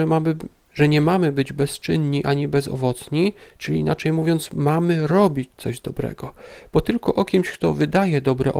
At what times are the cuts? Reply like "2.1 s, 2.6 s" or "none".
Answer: none